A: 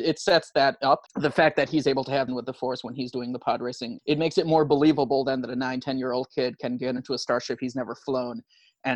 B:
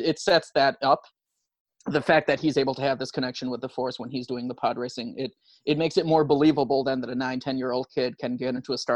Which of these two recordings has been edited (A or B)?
A